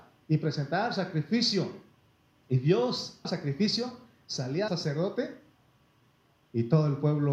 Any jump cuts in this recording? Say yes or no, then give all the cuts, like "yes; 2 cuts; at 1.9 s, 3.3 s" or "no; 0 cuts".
yes; 2 cuts; at 3.2 s, 4.7 s